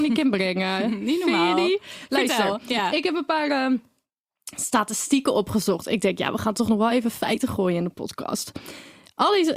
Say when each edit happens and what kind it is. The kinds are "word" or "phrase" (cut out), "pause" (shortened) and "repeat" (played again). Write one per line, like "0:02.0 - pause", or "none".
none